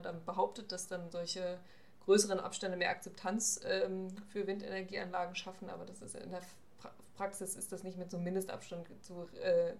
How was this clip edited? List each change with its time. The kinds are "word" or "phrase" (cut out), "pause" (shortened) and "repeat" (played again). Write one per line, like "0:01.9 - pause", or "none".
none